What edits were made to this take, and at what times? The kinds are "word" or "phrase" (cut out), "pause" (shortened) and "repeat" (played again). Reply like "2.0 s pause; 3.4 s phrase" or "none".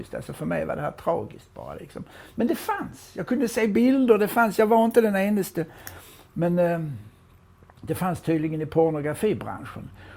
none